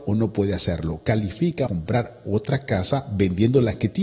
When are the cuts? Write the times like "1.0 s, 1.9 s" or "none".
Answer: 1.7 s